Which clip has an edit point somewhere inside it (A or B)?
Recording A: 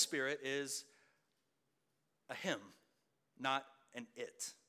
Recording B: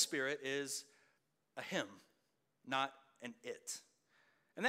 B